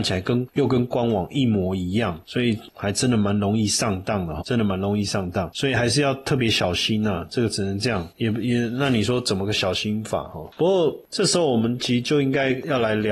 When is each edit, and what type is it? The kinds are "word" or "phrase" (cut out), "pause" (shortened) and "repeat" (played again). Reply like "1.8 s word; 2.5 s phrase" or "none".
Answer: 4.4 s word